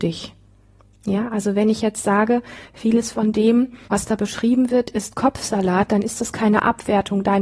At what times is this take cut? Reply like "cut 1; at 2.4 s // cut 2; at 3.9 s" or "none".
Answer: cut 1; at 3.8 s